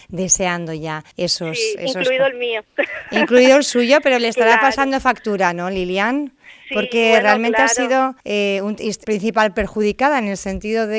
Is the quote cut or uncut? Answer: cut